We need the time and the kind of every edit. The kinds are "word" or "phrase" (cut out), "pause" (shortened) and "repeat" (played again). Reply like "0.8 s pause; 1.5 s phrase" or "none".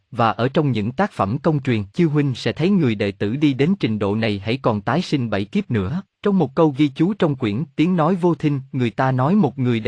1.9 s pause; 6.1 s pause